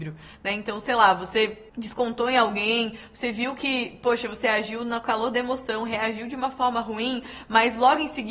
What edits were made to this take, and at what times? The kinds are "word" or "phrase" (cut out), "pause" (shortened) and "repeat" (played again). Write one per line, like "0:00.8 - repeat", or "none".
0:01.7 - pause